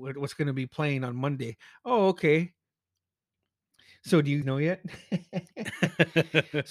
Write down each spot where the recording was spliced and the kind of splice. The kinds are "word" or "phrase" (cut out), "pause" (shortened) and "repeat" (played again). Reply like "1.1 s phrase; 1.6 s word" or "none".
4.4 s word